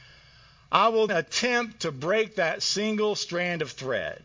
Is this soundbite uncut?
no; 1 cut; at 1.1 s

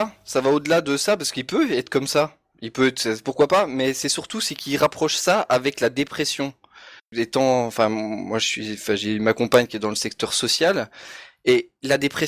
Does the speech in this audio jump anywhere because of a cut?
no; 0 cuts

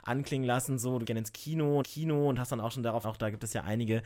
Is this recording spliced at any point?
yes; 3 cuts; at 1.0 s, 1.8 s, 3.0 s

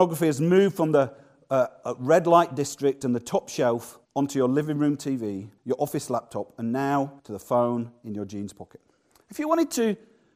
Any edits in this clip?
yes; 4 cuts; at 4.0 s, 5.6 s, 7.2 s, 9.1 s

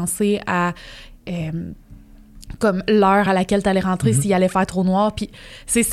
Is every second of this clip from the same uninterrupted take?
yes; 0 cuts

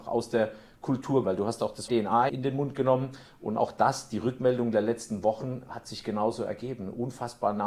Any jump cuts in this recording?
yes; 3 cuts; at 1.2 s, 1.9 s, 2.3 s

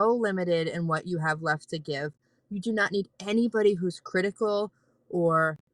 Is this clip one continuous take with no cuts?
yes; 0 cuts

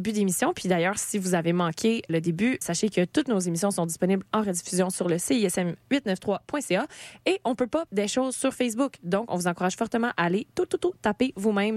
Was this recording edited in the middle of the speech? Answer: yes; 3 cuts; at 2.1 s, 2.6 s, 7.9 s

